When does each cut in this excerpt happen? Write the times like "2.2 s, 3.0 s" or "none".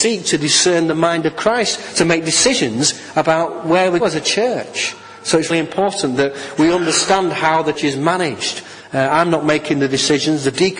4.0 s, 5.5 s, 7.8 s